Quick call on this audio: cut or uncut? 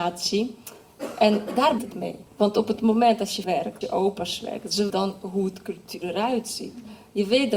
cut